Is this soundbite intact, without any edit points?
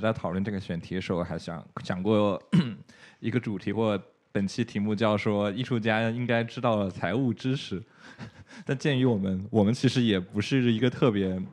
yes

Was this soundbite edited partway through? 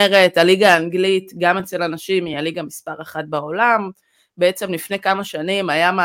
no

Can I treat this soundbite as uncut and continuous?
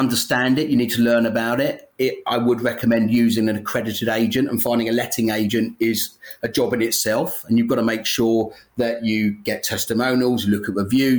yes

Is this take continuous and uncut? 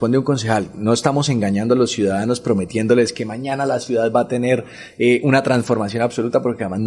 yes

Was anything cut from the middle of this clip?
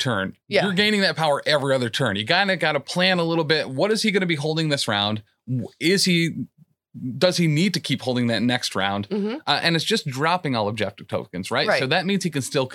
no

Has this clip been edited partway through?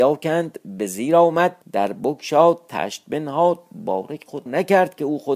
yes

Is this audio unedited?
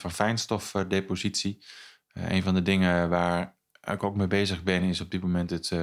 yes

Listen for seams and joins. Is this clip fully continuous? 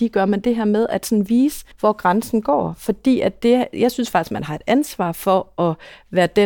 no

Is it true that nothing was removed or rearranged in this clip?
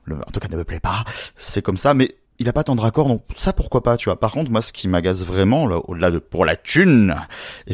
no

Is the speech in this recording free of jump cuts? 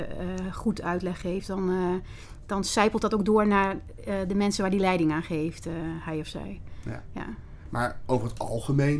yes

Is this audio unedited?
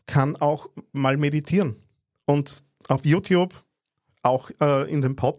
yes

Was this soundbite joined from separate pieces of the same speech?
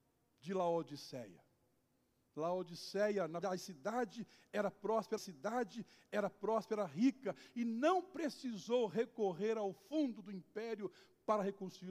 yes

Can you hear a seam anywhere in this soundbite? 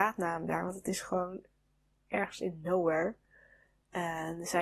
no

